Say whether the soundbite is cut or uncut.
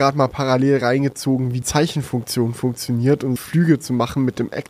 cut